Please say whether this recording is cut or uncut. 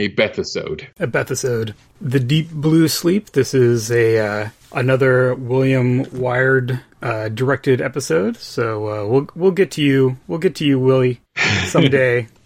uncut